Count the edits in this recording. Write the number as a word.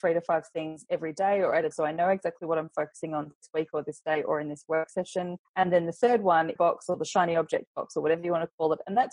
three